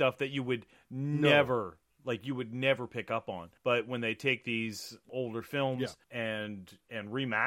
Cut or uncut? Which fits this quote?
cut